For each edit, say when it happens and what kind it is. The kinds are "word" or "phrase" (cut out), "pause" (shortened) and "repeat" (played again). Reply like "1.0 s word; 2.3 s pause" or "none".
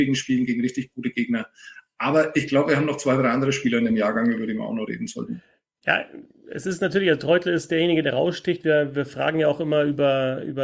none

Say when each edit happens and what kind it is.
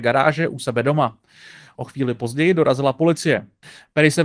none

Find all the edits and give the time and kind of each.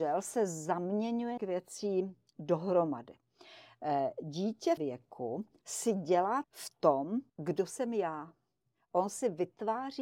1.4 s word; 4.8 s phrase; 6.4 s phrase; 7.3 s pause

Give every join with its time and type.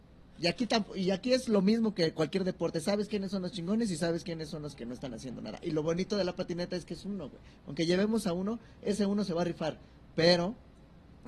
none

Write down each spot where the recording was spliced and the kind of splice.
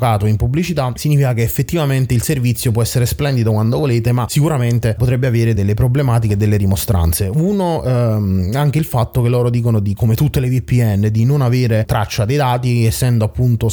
5.0 s word

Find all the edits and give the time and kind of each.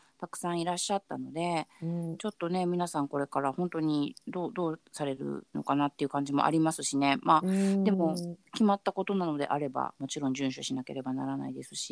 4.2 s pause

